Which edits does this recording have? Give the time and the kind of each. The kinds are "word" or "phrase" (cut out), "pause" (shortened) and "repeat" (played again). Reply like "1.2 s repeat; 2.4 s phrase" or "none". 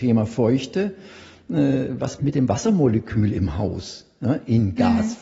2.2 s word

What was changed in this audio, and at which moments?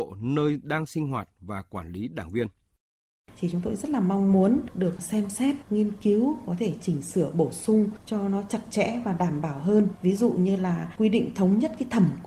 none

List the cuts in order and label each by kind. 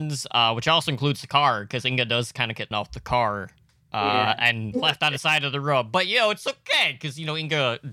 2.7 s word

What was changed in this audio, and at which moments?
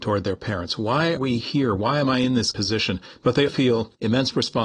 1.2 s word; 2.5 s word; 3.5 s word

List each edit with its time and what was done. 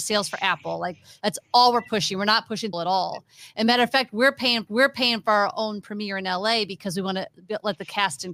2.7 s word; 4.7 s repeat

